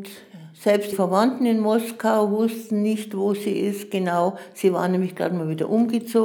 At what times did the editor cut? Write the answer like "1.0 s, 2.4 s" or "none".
0.9 s